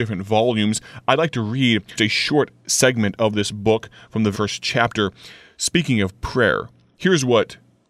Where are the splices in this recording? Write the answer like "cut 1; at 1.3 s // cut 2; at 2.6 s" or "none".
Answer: cut 1; at 2.0 s // cut 2; at 4.3 s